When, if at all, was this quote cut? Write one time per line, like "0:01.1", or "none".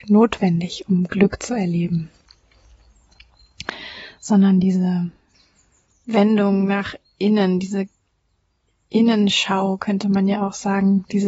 none